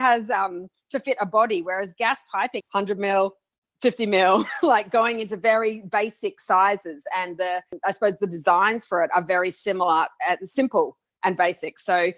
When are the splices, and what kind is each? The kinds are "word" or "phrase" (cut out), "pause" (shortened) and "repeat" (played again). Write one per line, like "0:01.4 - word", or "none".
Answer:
0:02.6 - phrase